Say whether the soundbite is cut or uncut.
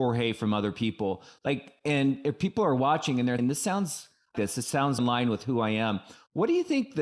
cut